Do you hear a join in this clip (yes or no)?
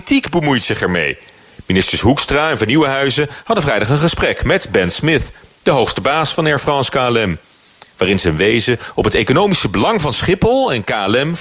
no